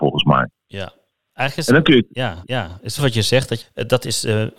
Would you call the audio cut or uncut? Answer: cut